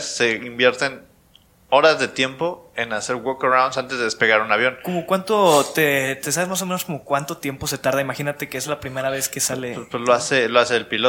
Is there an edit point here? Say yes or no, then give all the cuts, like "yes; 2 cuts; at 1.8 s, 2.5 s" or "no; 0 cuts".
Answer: no; 0 cuts